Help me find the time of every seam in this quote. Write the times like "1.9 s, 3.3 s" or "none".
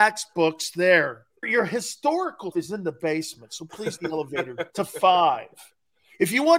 1.4 s, 2.5 s, 4.0 s, 4.7 s